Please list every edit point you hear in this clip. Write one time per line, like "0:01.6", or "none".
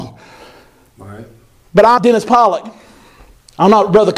0:02.0